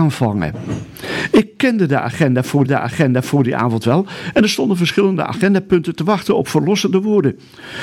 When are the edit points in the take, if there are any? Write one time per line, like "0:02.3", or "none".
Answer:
0:02.7